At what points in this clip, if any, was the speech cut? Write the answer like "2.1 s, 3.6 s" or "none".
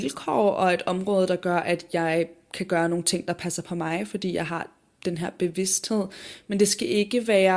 none